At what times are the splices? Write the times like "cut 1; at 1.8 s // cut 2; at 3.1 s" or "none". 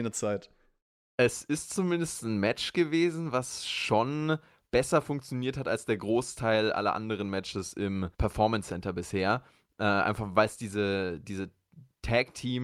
cut 1; at 8.1 s